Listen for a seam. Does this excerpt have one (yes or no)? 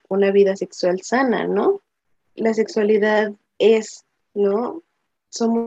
no